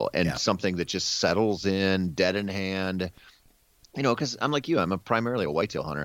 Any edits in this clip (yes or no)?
no